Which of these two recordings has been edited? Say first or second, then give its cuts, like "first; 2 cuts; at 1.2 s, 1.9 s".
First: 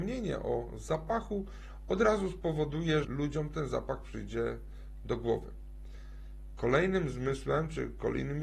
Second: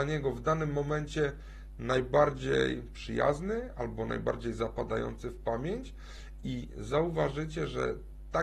first; 1 cut; at 3.0 s